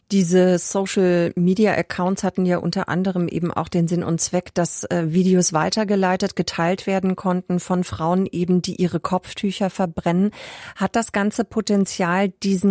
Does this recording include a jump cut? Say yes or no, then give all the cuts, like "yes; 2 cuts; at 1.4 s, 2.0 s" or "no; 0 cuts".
no; 0 cuts